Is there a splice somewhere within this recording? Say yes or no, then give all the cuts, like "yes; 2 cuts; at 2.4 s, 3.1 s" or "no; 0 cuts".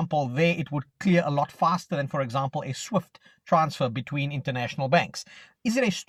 no; 0 cuts